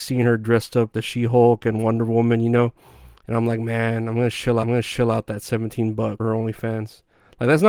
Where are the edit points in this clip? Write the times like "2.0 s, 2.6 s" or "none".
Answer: 0.9 s, 4.6 s, 6.2 s